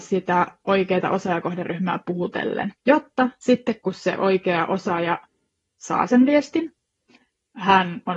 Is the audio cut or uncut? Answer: cut